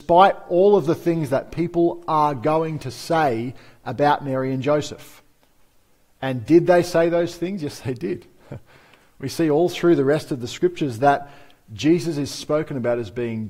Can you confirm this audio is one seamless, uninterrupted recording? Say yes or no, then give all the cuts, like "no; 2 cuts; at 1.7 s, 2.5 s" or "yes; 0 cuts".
yes; 0 cuts